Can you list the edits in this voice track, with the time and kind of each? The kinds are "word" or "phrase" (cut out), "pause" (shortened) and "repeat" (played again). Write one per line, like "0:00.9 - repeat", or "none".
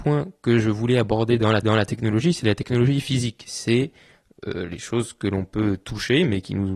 0:01.6 - repeat